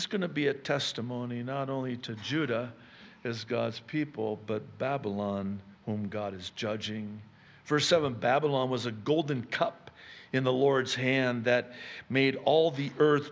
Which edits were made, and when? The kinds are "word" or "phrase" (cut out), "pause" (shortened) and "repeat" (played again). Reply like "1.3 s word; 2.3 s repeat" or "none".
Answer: 5.7 s pause